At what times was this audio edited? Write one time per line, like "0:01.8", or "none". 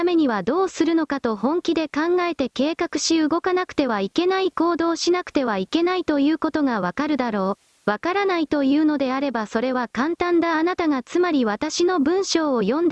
0:07.8